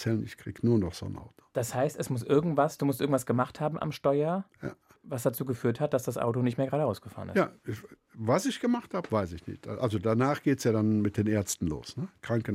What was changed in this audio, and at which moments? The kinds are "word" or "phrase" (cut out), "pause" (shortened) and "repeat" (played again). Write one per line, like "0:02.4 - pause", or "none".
none